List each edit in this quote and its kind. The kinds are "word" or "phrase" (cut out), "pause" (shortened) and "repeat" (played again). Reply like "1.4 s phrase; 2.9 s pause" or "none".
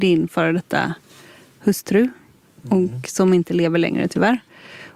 none

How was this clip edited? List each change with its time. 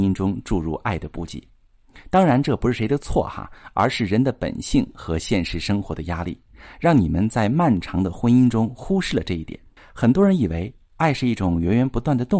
9.8 s pause

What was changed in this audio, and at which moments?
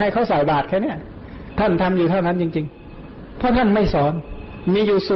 none

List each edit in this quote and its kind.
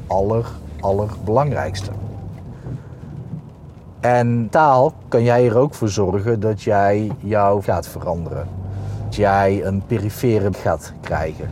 4.5 s word; 7.6 s word; 9.1 s word; 10.5 s word

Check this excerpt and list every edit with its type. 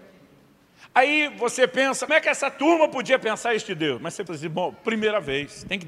2.1 s word; 4.3 s word

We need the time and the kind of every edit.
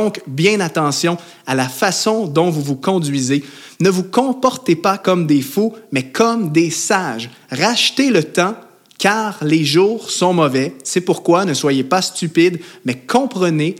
none

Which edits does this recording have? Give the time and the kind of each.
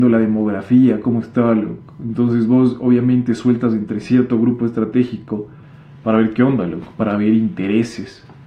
none

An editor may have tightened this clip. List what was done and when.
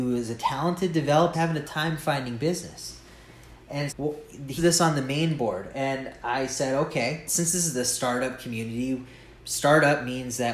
1.3 s word; 1.6 s word; 3.9 s word; 4.6 s word; 7.3 s word; 9.4 s pause

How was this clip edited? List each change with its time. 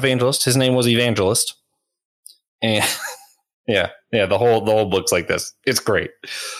none

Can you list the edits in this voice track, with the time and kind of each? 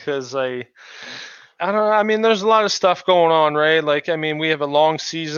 1.6 s word

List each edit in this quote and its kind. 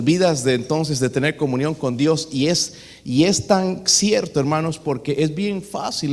none

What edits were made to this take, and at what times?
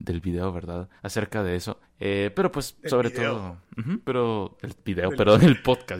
1.0 s pause; 1.8 s pause; 4.0 s pause

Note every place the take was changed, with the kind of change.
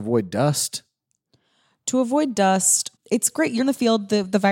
3.0 s word; 3.6 s word

